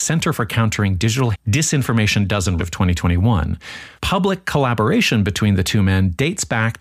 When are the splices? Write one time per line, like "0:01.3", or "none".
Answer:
0:01.3
0:02.6
0:04.0